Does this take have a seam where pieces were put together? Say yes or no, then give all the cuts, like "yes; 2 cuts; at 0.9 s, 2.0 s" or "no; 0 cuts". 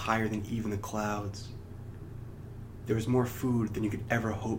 no; 0 cuts